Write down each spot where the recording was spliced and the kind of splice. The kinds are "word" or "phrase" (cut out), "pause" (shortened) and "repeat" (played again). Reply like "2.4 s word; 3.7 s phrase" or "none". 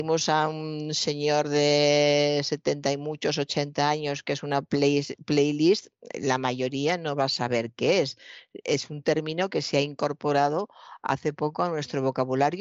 none